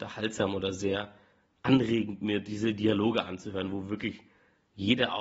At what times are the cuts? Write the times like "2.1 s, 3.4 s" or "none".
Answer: none

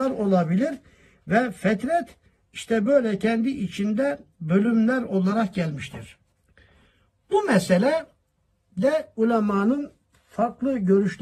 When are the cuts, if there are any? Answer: none

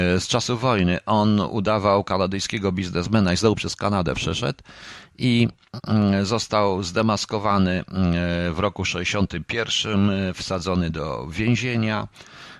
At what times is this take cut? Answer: none

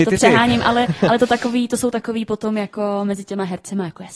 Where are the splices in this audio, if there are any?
none

